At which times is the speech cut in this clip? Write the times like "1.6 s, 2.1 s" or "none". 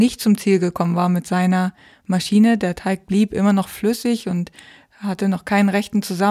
none